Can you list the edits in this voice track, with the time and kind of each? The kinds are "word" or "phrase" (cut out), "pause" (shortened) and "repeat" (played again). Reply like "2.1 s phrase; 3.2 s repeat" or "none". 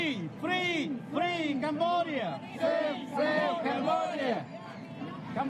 2.6 s word